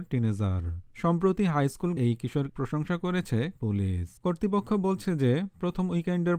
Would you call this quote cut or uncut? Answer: cut